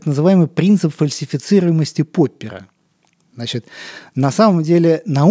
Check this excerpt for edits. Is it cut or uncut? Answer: uncut